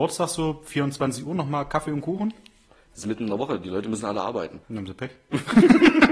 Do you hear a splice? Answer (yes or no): yes